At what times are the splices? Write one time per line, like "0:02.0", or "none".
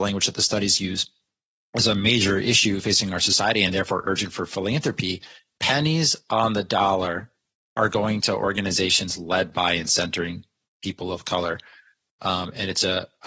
none